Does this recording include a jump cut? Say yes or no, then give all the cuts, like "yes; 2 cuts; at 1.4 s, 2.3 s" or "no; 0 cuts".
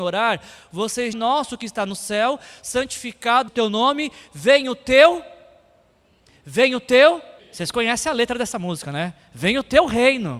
yes; 3 cuts; at 1.1 s, 3.5 s, 7.4 s